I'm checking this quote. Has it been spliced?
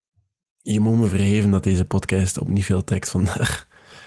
no; 0 cuts

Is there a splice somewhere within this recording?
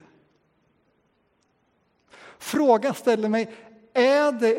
no; 0 cuts

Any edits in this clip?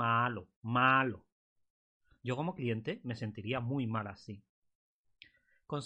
no; 0 cuts

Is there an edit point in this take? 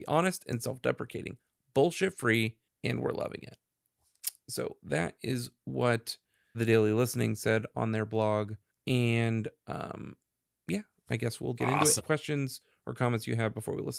yes; 3 cuts; at 6.5 s, 11.5 s, 12.0 s

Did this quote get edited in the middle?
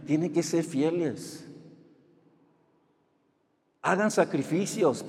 no; 0 cuts

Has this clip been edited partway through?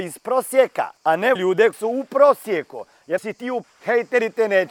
yes; 5 cuts; at 1.0 s, 1.4 s, 1.7 s, 3.2 s, 3.6 s

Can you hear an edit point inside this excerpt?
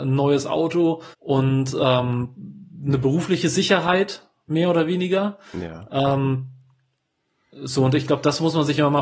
yes; 1 cut; at 1.1 s

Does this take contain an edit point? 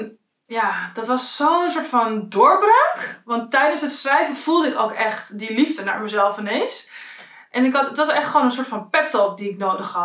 no; 0 cuts

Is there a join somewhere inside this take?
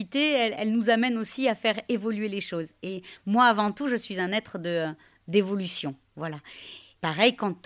no; 0 cuts

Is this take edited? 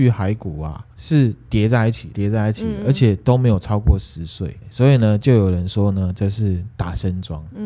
yes; 1 cut; at 2.1 s

